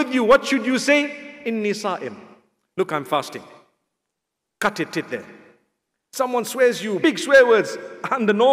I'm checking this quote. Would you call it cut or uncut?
cut